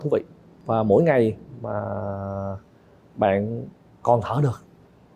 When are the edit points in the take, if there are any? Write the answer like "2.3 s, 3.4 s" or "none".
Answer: none